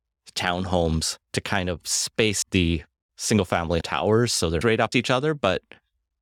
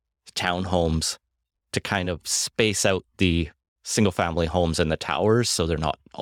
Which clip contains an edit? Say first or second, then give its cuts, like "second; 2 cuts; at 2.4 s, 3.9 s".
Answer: first; 5 cuts; at 1.2 s, 2.4 s, 3.8 s, 4.6 s, 4.9 s